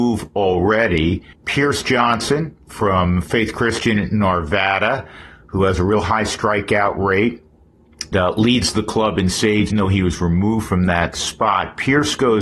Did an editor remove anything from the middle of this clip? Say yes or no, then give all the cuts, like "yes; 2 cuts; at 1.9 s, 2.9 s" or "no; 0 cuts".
yes; 3 cuts; at 1.3 s, 8.1 s, 9.7 s